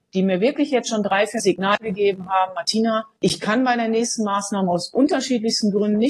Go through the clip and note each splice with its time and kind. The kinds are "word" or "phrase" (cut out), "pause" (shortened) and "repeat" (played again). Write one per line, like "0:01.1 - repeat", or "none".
0:01.4 - phrase
0:03.2 - pause

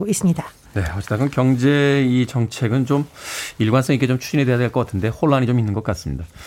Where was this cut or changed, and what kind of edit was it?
none

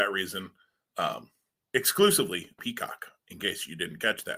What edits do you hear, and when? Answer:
0:02.6 - word

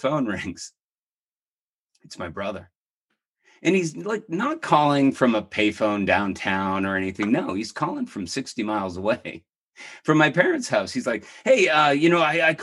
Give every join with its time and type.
none

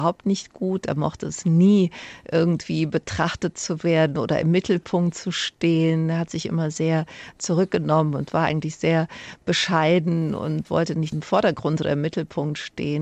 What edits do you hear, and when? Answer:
none

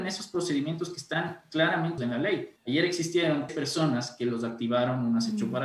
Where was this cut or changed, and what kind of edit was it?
0:02.0 - word
0:02.6 - pause
0:03.5 - word

